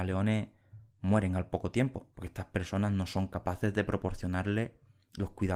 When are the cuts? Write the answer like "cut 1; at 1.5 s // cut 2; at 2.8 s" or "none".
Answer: cut 1; at 2.1 s